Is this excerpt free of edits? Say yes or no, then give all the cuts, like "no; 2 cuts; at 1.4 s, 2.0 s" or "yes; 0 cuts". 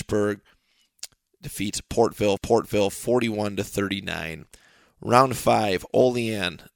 no; 1 cut; at 2.4 s